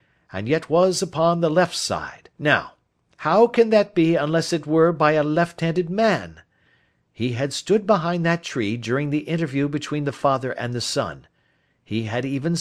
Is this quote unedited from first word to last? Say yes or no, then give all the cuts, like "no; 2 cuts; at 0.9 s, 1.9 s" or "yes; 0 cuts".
no; 1 cut; at 2.3 s